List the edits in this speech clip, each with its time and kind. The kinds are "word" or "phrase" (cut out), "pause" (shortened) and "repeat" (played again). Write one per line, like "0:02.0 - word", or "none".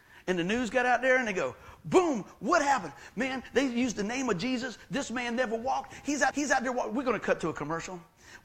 0:06.3 - repeat